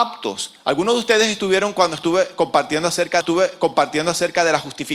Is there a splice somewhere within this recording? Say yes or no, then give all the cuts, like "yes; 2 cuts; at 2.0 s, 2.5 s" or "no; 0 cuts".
yes; 1 cut; at 3.2 s